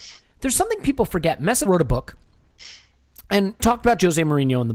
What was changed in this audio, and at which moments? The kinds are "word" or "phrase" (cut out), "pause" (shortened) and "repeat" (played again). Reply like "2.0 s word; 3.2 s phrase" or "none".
1.7 s word; 3.6 s word